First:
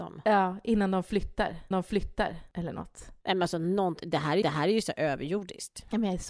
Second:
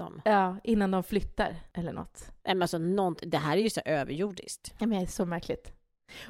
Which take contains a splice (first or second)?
first